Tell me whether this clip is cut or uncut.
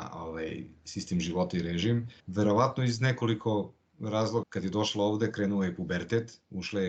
cut